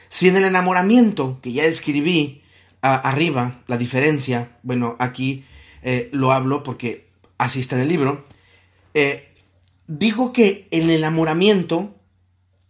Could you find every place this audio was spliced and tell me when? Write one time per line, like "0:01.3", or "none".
none